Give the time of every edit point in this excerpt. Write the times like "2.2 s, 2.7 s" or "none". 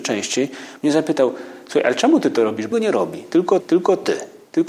2.7 s, 3.6 s